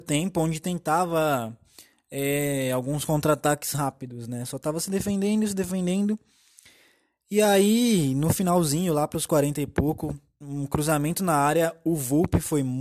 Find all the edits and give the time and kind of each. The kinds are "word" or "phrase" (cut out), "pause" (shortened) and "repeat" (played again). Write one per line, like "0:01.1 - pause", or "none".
none